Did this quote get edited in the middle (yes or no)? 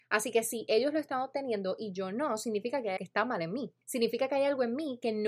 yes